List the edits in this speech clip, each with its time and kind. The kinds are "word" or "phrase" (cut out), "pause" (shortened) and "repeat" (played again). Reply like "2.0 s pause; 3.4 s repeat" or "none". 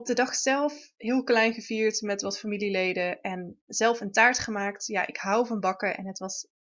none